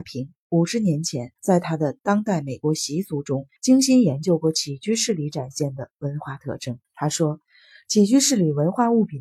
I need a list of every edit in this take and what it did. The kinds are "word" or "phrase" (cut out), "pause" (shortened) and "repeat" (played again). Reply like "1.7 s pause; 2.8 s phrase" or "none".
1.4 s pause; 3.6 s pause; 6.8 s pause